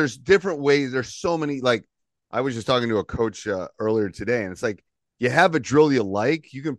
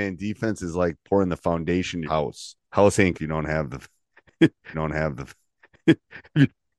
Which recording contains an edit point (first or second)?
second